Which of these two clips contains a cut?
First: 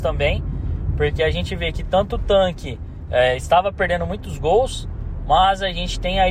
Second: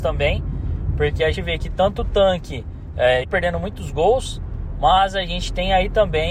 second; 2 cuts; at 1.3 s, 3.2 s

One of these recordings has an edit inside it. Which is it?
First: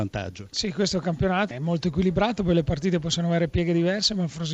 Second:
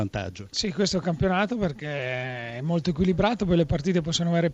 first; 1 cut; at 1.5 s

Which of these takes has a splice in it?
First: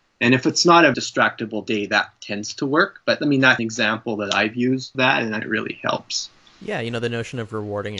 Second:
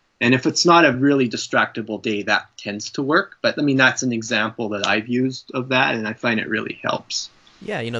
first; 4 cuts; at 0.9 s, 3.6 s, 4.9 s, 5.4 s

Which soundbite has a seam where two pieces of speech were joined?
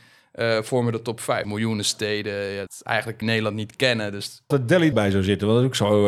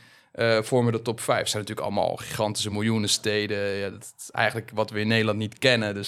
first; 5 cuts; at 1.4 s, 2.7 s, 3.2 s, 4.5 s, 4.9 s

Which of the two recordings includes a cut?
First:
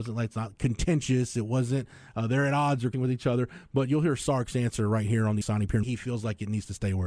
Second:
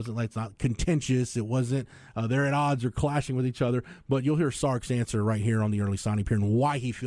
first; 3 cuts; at 2.9 s, 5.4 s, 5.8 s

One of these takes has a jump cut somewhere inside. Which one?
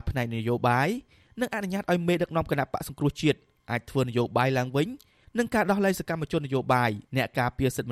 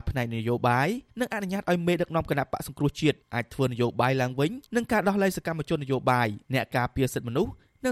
second; 3 cuts; at 1.1 s, 3.2 s, 4.7 s

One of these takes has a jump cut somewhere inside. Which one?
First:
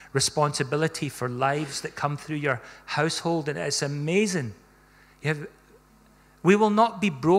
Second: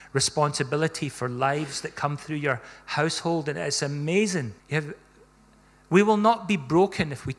second; 1 cut; at 4.6 s

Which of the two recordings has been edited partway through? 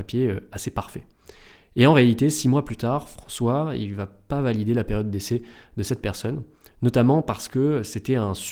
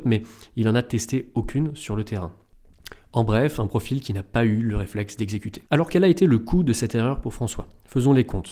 second; 1 cut; at 5.7 s

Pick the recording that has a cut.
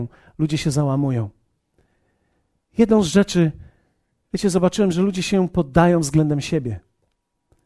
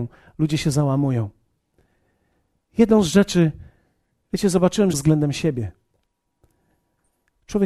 second; 1 cut; at 4.9 s

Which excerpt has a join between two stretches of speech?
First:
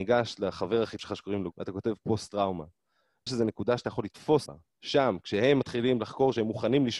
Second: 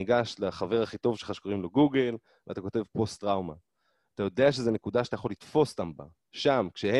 first; 4 cuts; at 1.0 s, 1.5 s, 3.3 s, 4.5 s

